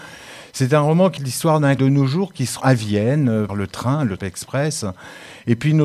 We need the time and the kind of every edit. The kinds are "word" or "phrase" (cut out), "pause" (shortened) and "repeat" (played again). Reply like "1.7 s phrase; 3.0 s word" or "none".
1.2 s word; 1.8 s word; 2.6 s word; 3.5 s word; 4.2 s word